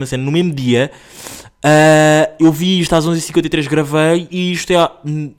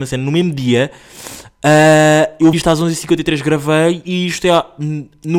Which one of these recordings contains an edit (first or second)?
second